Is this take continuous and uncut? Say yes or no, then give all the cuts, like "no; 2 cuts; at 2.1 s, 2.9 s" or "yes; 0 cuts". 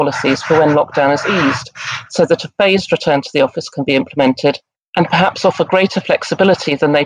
yes; 0 cuts